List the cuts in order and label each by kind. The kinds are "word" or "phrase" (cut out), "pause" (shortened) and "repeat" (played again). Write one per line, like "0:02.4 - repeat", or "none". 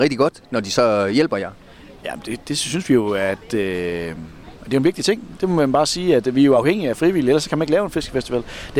none